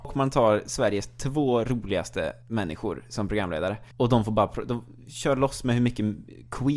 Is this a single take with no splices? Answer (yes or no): no